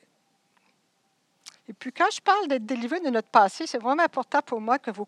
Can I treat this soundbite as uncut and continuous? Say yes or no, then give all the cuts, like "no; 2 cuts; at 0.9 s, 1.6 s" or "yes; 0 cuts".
no; 1 cut; at 1.6 s